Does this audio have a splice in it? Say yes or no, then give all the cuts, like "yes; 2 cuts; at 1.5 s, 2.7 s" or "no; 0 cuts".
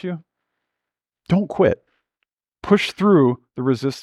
no; 0 cuts